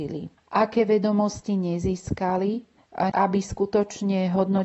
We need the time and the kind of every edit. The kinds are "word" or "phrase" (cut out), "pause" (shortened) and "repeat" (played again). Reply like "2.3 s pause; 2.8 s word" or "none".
3.1 s word